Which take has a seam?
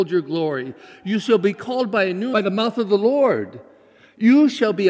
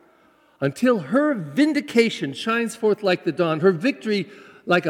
first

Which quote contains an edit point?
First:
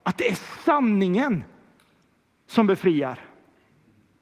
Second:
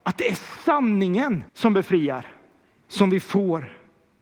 second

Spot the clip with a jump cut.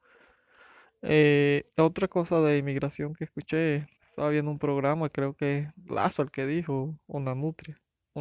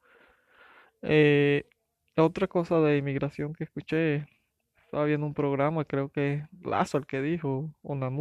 first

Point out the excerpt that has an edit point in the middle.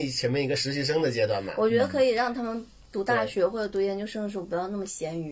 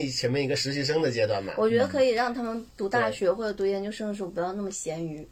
second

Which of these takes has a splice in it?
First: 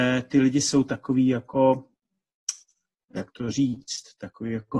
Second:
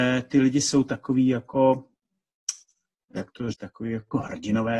second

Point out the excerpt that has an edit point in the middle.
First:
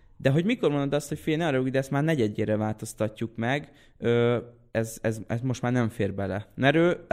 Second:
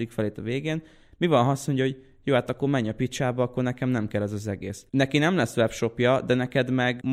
second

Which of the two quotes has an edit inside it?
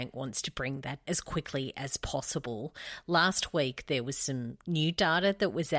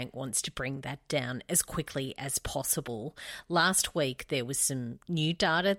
first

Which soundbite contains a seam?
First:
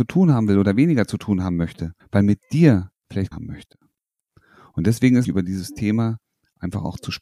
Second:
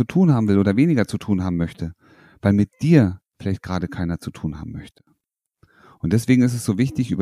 first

